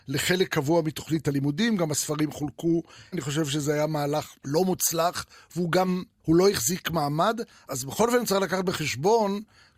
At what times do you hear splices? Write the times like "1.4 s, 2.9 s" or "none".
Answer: 3.1 s, 4.4 s, 6.2 s